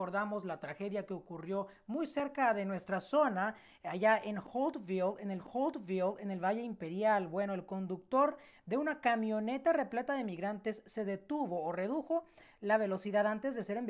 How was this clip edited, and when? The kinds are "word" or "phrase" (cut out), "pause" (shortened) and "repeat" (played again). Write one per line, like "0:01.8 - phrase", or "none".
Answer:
0:05.4 - repeat